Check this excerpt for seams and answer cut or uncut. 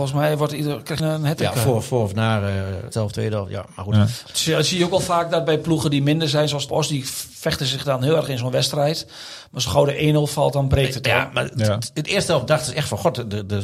cut